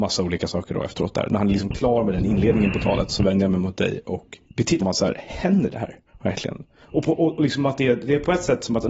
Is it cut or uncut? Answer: cut